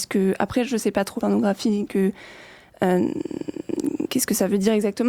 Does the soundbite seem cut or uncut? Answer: cut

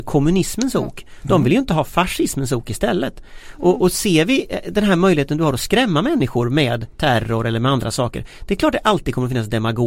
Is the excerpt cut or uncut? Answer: cut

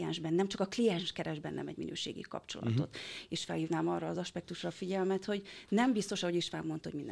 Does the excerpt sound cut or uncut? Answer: uncut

